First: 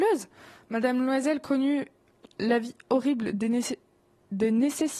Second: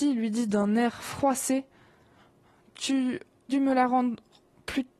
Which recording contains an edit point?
second; 1 cut; at 3.5 s

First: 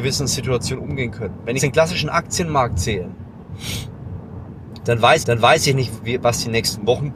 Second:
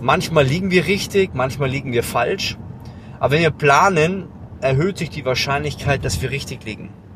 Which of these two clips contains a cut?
first; 2 cuts; at 1.6 s, 5.2 s

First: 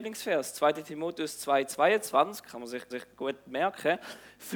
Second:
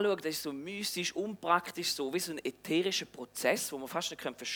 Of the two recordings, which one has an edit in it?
first; 1 cut; at 2.9 s

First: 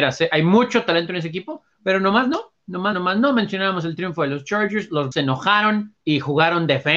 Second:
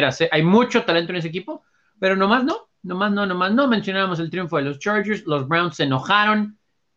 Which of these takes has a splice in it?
first; 4 cuts; at 1.7 s, 2.9 s, 5.1 s, 6.0 s

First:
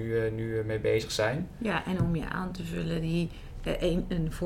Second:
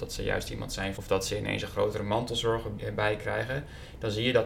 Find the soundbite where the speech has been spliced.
second; 2 cuts; at 1.0 s, 2.8 s

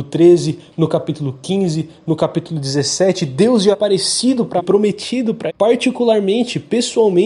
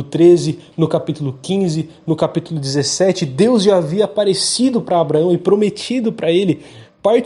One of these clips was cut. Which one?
first; 3 cuts; at 3.7 s, 4.6 s, 5.5 s

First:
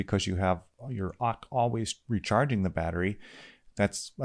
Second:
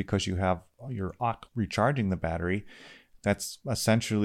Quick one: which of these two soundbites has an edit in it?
second; 1 cut; at 1.5 s

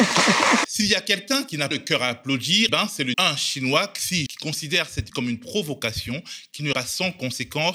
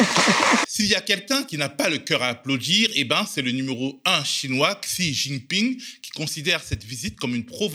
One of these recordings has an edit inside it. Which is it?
first; 6 cuts; at 1.7 s, 2.7 s, 3.1 s, 4.3 s, 5.1 s, 6.7 s

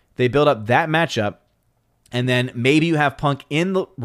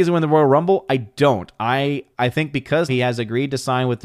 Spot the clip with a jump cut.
second; 2 cuts; at 2.1 s, 2.9 s

